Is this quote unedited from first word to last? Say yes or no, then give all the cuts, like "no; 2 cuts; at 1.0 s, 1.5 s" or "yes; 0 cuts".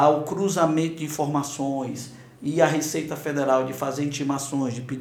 yes; 0 cuts